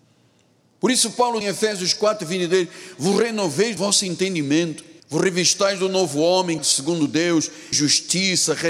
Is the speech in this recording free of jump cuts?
no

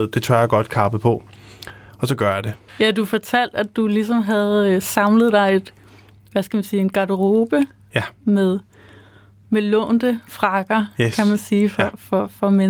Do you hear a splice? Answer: no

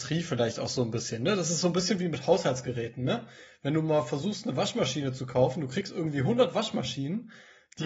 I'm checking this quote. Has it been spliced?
no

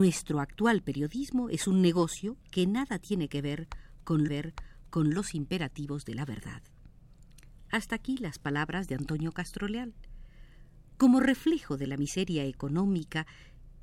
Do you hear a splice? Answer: yes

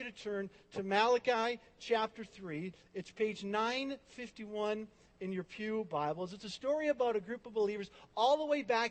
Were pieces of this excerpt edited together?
no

